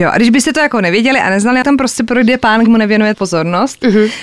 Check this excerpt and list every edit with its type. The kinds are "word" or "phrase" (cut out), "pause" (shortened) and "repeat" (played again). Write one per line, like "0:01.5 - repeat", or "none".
0:01.6 - phrase
0:02.7 - word
0:03.1 - word